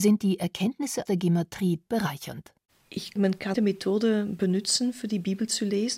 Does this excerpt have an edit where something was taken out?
yes; 4 cuts; at 1.1 s, 1.9 s, 3.2 s, 3.5 s

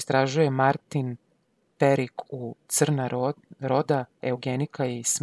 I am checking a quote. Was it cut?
no; 0 cuts

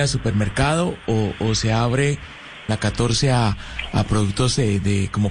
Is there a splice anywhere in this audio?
yes; 1 cut; at 2.7 s

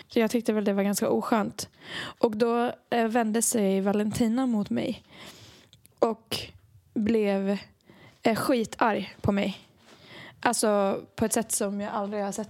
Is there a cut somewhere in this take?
no; 0 cuts

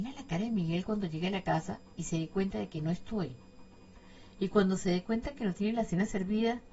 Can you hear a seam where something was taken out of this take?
no; 0 cuts

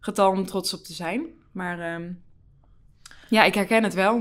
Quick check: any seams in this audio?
no; 0 cuts

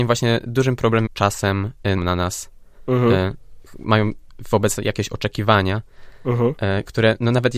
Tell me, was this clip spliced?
yes; 3 cuts; at 1.1 s, 2.0 s, 4.8 s

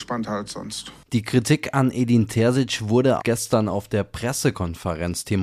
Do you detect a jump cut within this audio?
yes; 1 cut; at 3.2 s

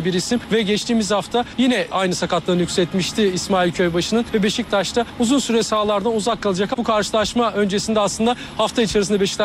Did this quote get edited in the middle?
no; 0 cuts

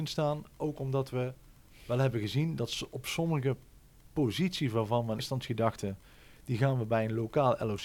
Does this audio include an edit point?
yes; 1 cut; at 5.2 s

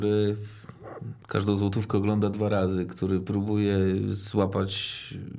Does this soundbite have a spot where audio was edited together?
no; 0 cuts

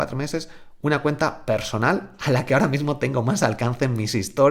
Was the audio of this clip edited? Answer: no; 0 cuts

